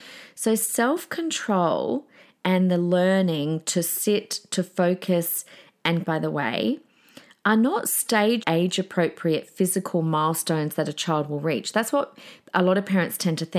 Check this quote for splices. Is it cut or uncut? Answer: cut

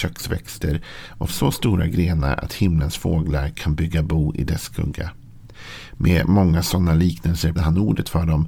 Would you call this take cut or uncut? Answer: cut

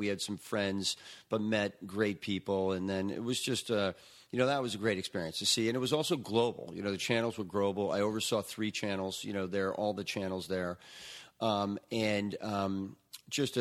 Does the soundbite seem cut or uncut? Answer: uncut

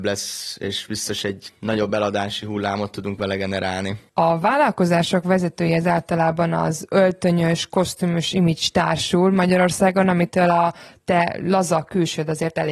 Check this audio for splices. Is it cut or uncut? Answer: uncut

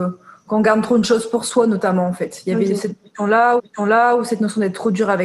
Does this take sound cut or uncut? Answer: cut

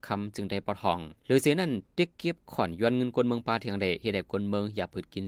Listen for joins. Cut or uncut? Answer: cut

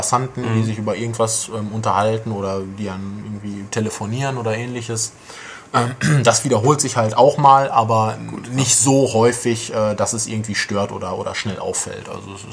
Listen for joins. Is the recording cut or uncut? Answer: uncut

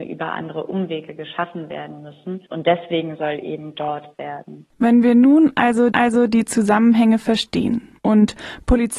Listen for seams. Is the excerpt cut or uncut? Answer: cut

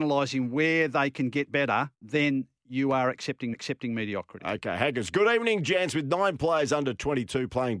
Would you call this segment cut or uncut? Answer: cut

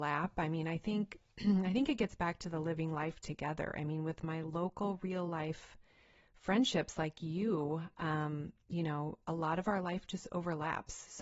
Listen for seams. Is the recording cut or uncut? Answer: uncut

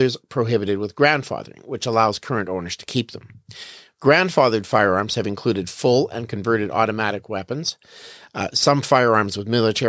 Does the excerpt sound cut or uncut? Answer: uncut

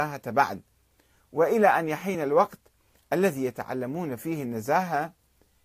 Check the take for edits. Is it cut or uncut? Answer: uncut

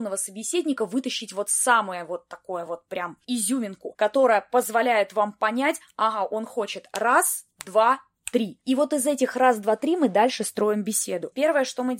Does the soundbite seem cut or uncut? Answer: uncut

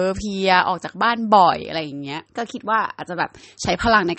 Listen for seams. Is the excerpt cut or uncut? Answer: cut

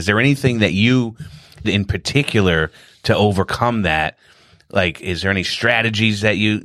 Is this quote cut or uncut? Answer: cut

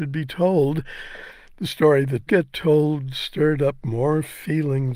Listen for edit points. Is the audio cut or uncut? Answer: cut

